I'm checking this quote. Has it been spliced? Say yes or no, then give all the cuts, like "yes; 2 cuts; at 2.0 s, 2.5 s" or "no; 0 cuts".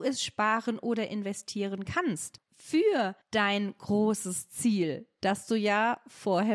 no; 0 cuts